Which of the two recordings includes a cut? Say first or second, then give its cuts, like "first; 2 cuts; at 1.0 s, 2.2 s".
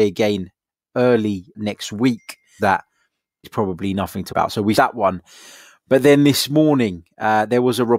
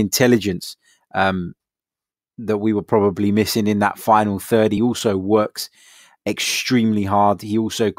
first; 5 cuts; at 1.5 s, 2.6 s, 3.4 s, 4.3 s, 4.7 s